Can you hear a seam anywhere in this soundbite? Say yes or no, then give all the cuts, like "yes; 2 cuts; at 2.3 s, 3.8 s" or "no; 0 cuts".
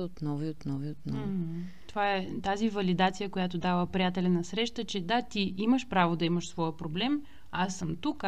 no; 0 cuts